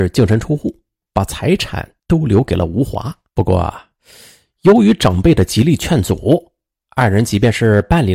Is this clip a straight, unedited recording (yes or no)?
no